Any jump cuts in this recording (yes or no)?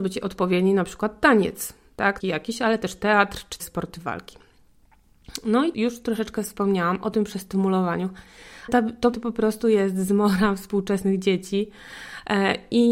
yes